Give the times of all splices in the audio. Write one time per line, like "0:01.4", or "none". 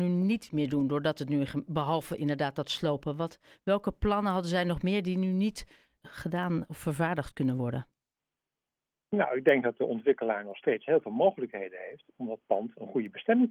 0:06.0